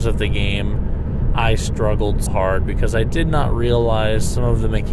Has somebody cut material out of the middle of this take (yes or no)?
yes